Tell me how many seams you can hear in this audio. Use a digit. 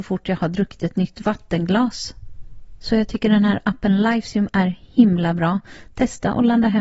0